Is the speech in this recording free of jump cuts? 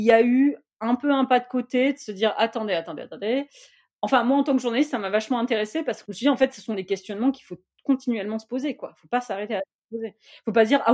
yes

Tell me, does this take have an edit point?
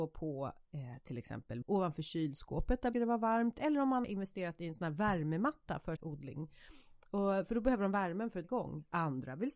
yes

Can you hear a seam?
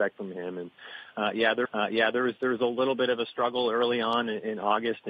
yes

